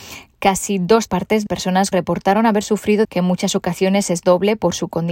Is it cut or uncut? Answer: cut